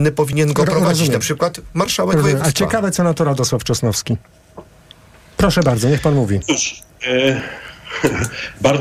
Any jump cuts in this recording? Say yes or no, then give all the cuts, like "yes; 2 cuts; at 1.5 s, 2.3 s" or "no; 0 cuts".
no; 0 cuts